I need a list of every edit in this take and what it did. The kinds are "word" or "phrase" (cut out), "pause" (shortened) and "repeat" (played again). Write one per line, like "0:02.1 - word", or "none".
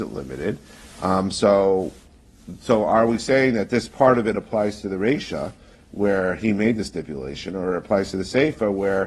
none